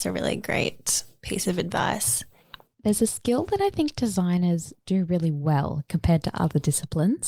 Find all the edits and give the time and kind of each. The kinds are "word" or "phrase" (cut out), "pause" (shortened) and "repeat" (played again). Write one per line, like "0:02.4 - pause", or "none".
none

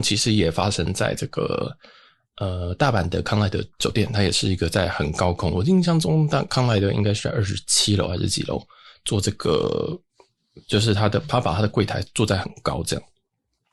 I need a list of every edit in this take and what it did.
0:03.7 - pause

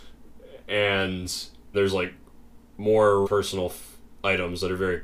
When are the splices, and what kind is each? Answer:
0:01.7 - word
0:03.2 - word

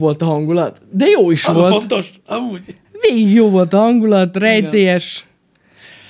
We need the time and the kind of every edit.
none

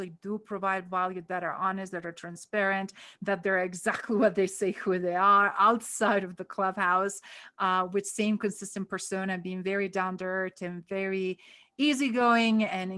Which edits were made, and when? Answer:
none

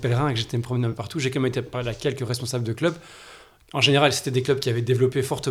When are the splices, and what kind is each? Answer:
none

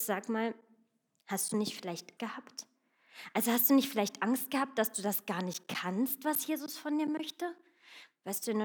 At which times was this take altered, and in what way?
0:02.2 - word

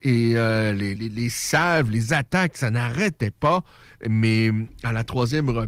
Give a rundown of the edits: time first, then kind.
0:01.0 - word

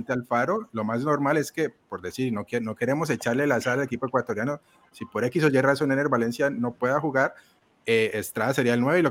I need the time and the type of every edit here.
none

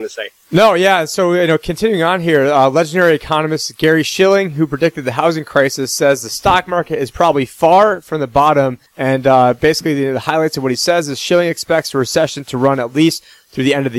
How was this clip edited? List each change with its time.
0:08.9 - pause

